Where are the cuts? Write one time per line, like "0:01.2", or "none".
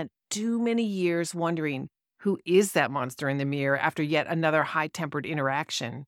none